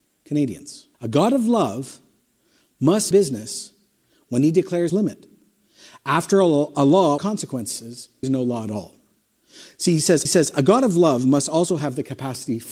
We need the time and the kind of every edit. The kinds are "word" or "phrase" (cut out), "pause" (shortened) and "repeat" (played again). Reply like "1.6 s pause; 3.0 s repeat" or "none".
0.9 s pause; 3.1 s word; 4.9 s phrase; 7.2 s word; 8.2 s word; 10.3 s repeat